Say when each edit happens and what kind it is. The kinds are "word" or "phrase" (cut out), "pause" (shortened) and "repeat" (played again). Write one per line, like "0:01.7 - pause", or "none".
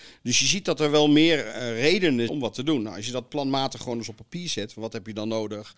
0:02.3 - word